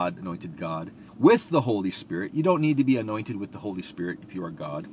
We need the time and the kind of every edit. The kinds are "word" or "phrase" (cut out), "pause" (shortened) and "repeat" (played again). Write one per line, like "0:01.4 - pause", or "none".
0:01.1 - pause